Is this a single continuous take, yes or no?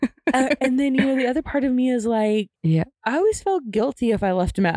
no